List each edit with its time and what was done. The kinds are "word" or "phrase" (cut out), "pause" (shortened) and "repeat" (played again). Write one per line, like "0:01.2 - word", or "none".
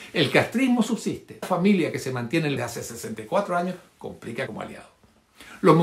0:01.4 - phrase
0:02.6 - phrase
0:04.5 - phrase